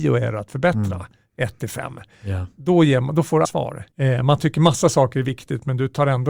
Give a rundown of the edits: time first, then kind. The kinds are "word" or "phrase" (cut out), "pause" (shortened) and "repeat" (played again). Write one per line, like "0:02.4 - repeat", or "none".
0:03.4 - word
0:03.9 - pause